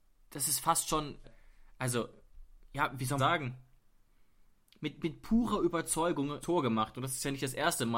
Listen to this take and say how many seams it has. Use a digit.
3